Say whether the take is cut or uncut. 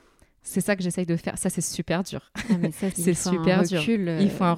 cut